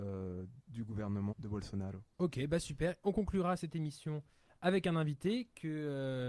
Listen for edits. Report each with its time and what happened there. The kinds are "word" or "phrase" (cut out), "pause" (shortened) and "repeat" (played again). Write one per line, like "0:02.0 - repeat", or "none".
0:01.3 - word
0:02.1 - pause